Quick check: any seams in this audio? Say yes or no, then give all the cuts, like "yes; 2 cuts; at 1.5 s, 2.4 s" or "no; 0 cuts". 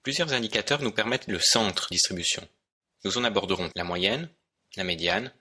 yes; 3 cuts; at 1.3 s, 1.9 s, 3.7 s